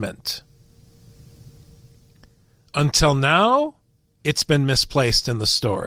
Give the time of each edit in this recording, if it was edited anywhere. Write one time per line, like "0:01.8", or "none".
none